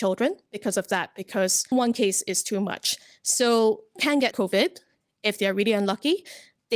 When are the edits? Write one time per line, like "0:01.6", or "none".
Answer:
0:01.7
0:04.0
0:04.3